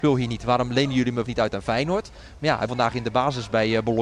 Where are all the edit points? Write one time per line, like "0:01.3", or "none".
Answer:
0:01.3
0:02.7